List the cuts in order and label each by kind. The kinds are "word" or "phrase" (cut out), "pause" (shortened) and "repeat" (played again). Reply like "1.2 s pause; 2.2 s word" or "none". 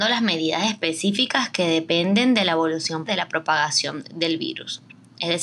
3.1 s word